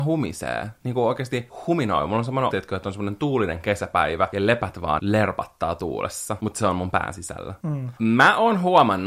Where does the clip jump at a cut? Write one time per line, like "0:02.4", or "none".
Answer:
0:02.5
0:05.0